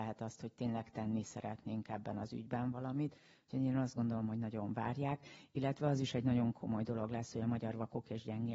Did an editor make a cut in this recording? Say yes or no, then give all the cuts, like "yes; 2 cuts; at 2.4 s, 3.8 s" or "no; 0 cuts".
no; 0 cuts